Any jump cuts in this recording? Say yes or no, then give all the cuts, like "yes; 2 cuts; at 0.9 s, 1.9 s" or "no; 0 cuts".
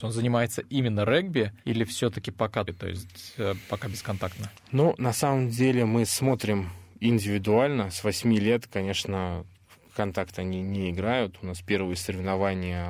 yes; 2 cuts; at 1.6 s, 2.7 s